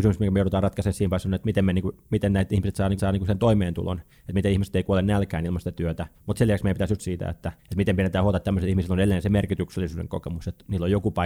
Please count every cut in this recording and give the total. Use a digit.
4